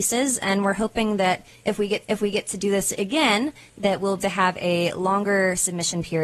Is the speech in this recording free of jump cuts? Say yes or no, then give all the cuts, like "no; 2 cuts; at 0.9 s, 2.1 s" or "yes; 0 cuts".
no; 2 cuts; at 2.0 s, 4.2 s